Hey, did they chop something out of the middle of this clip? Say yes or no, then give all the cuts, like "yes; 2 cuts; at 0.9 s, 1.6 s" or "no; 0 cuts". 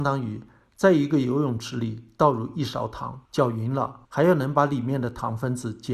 yes; 2 cuts; at 3.2 s, 4.0 s